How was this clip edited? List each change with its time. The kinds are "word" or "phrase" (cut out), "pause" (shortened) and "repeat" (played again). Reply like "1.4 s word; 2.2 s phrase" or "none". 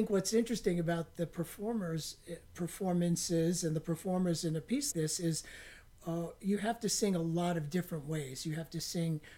4.9 s word